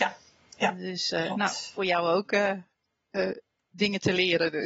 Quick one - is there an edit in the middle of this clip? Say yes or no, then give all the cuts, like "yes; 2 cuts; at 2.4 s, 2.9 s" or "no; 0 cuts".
no; 0 cuts